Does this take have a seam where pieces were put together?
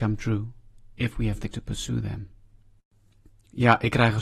yes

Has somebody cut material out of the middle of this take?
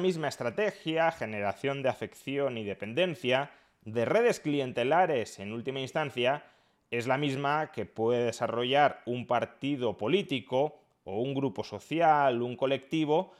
no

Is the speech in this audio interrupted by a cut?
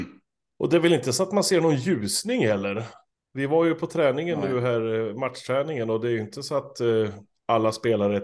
yes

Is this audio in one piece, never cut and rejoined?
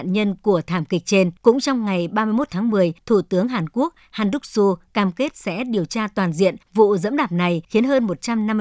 no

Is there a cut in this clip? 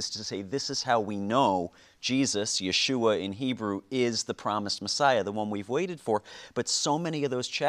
no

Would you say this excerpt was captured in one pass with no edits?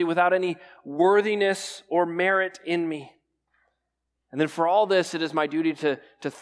yes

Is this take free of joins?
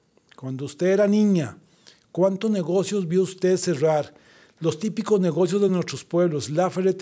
yes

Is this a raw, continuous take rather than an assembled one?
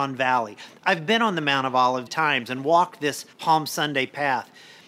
no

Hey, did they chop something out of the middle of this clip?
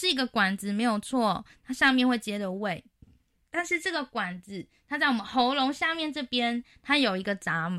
no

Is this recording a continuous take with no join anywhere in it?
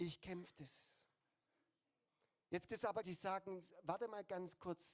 no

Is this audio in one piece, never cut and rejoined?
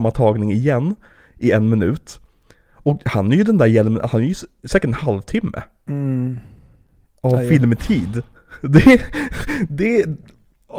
yes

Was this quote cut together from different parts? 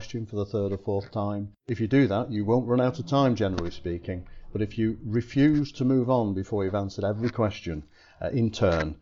no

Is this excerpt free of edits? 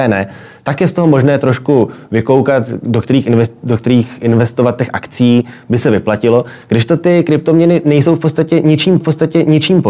no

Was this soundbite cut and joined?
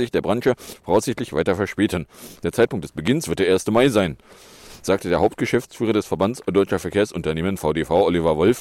no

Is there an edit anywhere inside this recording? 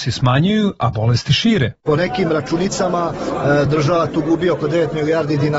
no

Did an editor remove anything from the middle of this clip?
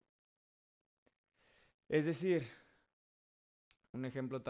no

